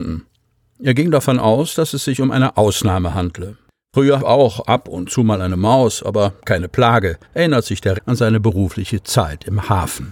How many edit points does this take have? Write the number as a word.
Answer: four